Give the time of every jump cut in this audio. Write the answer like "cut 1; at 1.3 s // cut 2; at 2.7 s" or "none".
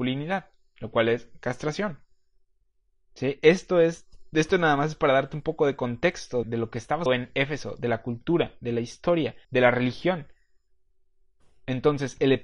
cut 1; at 6.4 s // cut 2; at 7.1 s // cut 3; at 9.4 s